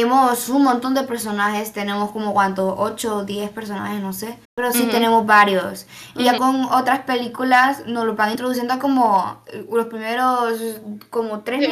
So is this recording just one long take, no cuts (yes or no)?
no